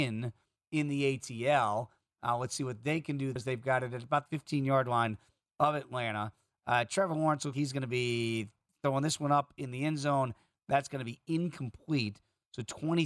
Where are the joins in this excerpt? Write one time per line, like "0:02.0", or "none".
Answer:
0:03.4
0:04.3
0:07.5